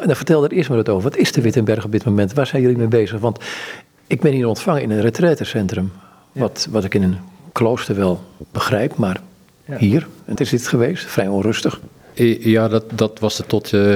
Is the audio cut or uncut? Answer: cut